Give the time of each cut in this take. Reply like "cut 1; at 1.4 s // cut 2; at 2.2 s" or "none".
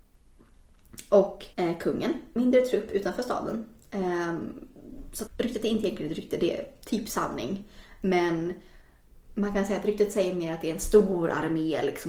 cut 1; at 1.5 s // cut 2; at 2.4 s // cut 3; at 5.3 s // cut 4; at 9.2 s